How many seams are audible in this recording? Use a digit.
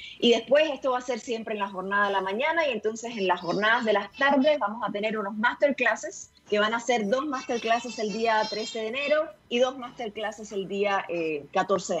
2